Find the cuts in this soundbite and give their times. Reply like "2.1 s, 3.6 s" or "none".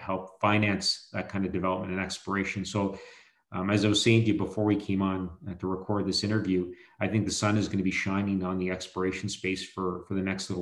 none